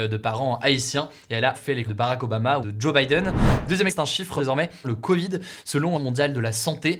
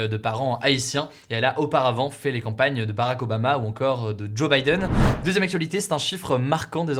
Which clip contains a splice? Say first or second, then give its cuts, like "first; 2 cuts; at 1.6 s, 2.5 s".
first; 7 cuts; at 1.5 s, 1.9 s, 2.6 s, 3.9 s, 4.4 s, 4.8 s, 5.9 s